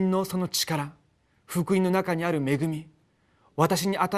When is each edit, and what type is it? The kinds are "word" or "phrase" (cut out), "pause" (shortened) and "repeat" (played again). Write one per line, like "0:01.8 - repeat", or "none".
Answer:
none